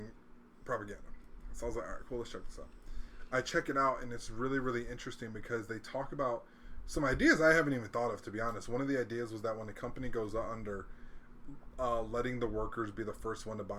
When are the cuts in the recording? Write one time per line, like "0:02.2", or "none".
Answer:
none